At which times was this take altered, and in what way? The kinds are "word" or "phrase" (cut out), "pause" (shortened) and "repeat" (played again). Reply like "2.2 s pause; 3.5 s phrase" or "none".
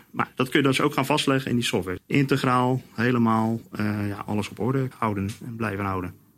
2.0 s phrase; 4.3 s word; 4.9 s word